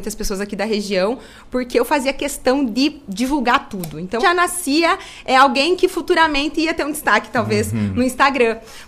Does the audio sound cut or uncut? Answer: cut